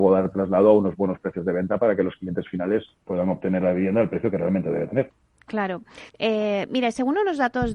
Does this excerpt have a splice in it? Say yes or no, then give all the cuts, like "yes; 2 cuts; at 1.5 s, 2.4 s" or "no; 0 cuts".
yes; 1 cut; at 6.1 s